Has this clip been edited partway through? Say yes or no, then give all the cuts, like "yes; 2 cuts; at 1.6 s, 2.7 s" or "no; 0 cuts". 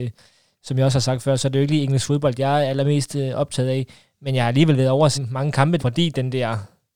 yes; 2 cuts; at 5.1 s, 5.8 s